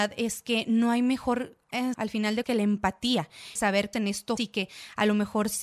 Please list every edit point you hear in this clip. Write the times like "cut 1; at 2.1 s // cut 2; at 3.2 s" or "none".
cut 1; at 1.9 s // cut 2; at 2.4 s // cut 3; at 3.6 s // cut 4; at 3.9 s // cut 5; at 4.4 s